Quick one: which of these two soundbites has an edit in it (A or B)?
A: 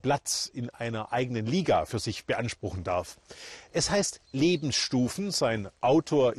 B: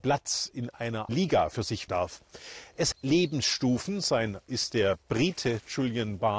B